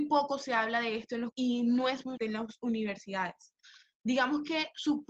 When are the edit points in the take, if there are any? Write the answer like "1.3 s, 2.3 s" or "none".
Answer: 1.3 s, 2.2 s